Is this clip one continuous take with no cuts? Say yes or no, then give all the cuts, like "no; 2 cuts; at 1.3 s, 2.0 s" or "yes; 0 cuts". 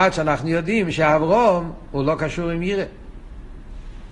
yes; 0 cuts